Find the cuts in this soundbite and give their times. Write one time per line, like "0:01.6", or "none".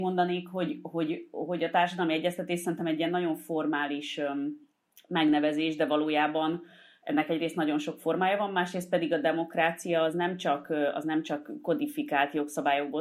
none